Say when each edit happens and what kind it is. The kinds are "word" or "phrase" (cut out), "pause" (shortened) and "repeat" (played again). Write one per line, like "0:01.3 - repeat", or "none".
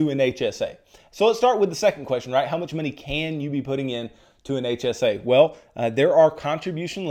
none